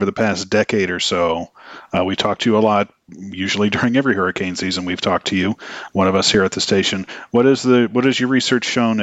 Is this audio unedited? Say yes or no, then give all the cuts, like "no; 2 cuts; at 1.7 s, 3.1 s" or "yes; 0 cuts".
yes; 0 cuts